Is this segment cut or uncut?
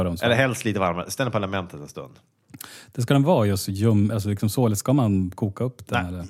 uncut